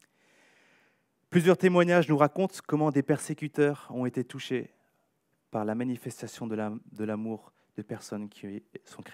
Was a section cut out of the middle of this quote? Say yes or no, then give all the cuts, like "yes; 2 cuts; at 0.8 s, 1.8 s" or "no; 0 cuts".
no; 0 cuts